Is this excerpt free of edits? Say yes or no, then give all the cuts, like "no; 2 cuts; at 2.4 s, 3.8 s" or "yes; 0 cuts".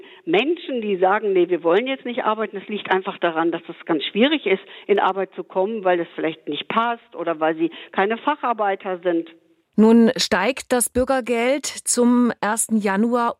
yes; 0 cuts